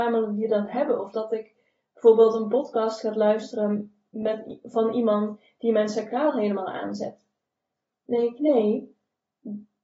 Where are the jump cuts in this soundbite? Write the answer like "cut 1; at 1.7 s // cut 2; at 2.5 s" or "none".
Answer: none